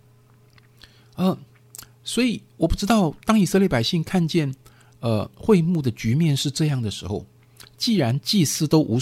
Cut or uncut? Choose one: cut